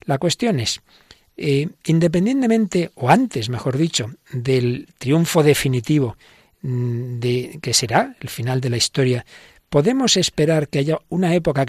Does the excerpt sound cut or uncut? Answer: uncut